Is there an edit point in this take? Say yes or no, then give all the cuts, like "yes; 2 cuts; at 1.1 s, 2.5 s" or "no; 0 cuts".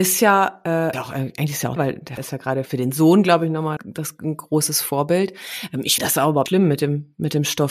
yes; 7 cuts; at 0.9 s, 1.8 s, 2.2 s, 2.7 s, 3.8 s, 6.0 s, 6.5 s